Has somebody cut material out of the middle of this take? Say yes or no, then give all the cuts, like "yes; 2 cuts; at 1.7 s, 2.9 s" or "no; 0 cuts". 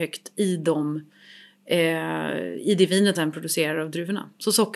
yes; 1 cut; at 3.1 s